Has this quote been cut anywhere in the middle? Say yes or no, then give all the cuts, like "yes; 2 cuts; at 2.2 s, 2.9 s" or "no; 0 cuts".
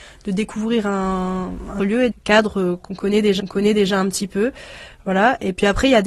yes; 3 cuts; at 1.8 s, 2.1 s, 3.4 s